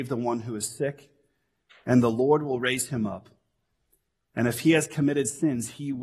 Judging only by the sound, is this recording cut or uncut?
uncut